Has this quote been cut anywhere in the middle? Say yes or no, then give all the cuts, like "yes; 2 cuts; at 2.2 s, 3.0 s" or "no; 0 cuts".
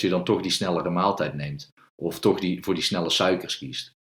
no; 0 cuts